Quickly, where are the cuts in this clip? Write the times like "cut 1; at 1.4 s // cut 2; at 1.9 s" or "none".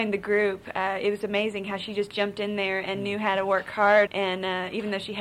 cut 1; at 4.1 s